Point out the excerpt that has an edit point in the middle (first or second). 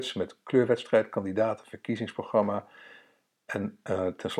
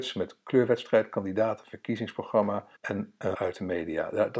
second